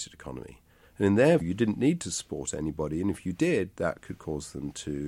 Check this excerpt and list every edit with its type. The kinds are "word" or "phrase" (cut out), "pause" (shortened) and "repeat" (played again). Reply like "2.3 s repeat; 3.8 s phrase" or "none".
1.4 s word